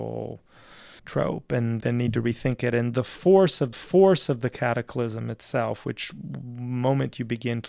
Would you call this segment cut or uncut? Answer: cut